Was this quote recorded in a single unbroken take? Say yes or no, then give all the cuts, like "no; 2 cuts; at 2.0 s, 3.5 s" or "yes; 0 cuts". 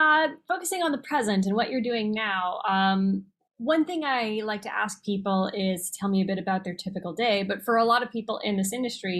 yes; 0 cuts